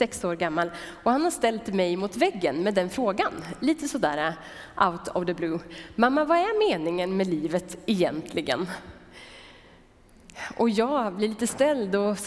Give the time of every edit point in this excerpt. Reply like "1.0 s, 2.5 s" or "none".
none